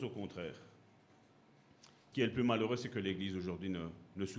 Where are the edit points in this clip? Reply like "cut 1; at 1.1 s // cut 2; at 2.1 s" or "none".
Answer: cut 1; at 2.1 s